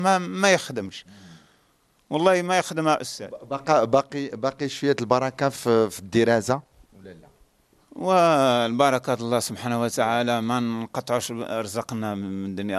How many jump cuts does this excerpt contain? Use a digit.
0